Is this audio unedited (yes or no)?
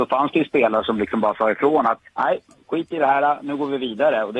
no